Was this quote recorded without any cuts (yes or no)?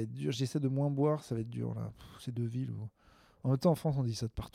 yes